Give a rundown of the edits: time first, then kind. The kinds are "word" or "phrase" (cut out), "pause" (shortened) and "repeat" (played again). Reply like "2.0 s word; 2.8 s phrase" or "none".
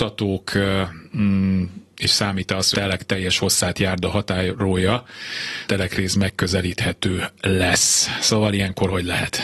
2.7 s word; 5.7 s phrase